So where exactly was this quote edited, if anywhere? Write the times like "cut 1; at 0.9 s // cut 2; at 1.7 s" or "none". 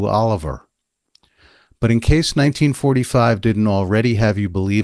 none